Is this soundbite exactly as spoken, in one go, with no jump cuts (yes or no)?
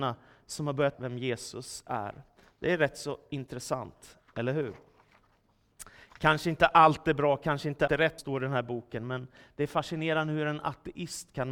no